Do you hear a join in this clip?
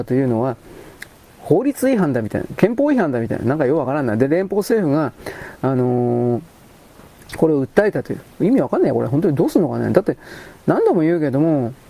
no; 0 cuts

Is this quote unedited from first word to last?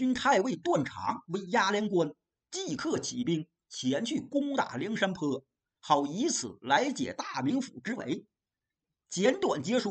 yes; 0 cuts

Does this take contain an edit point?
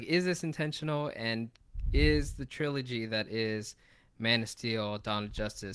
no; 0 cuts

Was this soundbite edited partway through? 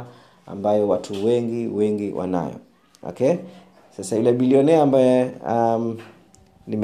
no; 0 cuts

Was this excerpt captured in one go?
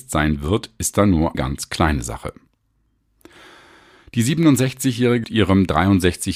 no; 2 cuts; at 1.3 s, 5.2 s

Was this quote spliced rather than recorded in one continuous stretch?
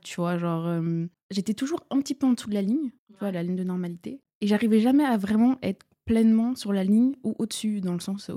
yes; 2 cuts; at 1.1 s, 3.0 s

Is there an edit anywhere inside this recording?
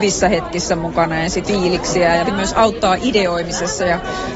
yes; 2 cuts; at 1.4 s, 2.2 s

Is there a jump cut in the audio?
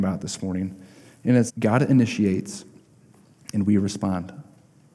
yes; 1 cut; at 1.5 s

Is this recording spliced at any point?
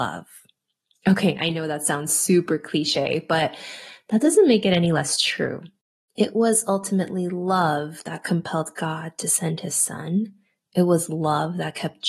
yes; 1 cut; at 5.8 s

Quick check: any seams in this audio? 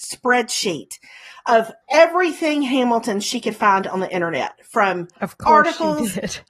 yes; 1 cut; at 1.8 s

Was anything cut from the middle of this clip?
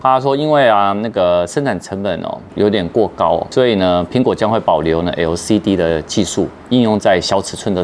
no; 0 cuts

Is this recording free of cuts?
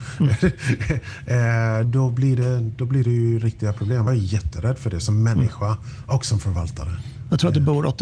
no; 2 cuts; at 1.8 s, 4.1 s

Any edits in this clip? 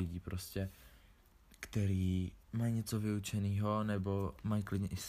yes; 1 cut; at 2.4 s

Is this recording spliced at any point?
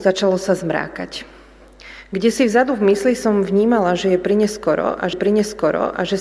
yes; 1 cut; at 5.1 s

